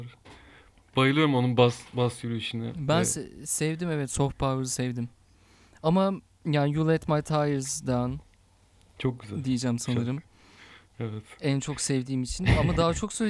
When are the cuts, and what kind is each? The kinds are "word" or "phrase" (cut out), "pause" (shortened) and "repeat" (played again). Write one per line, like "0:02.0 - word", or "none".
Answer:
none